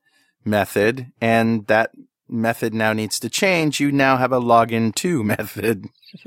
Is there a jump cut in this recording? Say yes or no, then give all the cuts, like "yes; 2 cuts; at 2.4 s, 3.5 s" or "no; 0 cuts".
no; 0 cuts